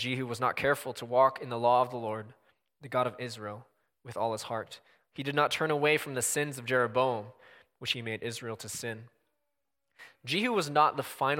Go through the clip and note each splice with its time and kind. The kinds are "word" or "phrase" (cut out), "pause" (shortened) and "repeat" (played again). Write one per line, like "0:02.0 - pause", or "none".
none